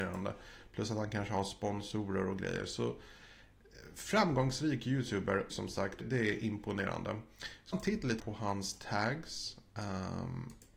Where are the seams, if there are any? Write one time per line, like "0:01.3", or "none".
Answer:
0:05.5
0:06.0
0:07.7
0:08.2